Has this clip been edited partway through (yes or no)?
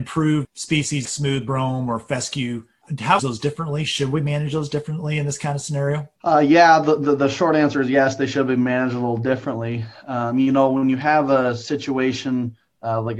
yes